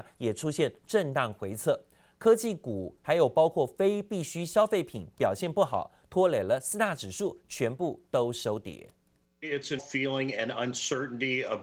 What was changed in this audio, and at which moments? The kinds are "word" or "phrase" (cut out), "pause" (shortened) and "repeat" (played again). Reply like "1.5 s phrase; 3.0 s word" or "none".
9.2 s pause; 9.8 s word